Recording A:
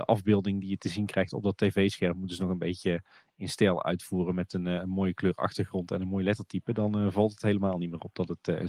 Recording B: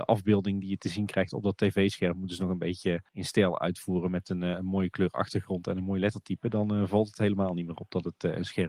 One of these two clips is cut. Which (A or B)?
B